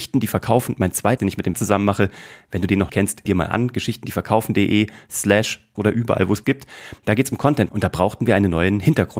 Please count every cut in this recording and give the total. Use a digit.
7